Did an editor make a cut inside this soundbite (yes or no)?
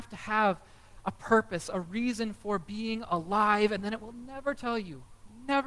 no